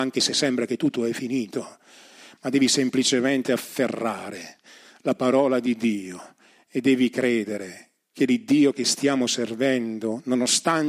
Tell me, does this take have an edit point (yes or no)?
no